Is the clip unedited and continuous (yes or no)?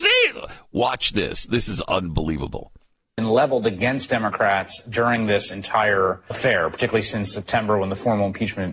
no